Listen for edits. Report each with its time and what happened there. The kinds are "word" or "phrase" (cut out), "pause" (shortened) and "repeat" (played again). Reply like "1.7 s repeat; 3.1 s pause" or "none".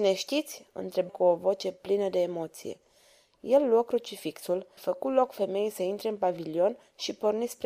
1.1 s word; 4.8 s word